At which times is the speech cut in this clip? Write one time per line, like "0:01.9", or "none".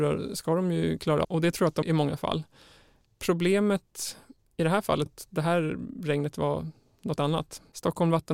0:01.2
0:01.8
0:05.1
0:07.2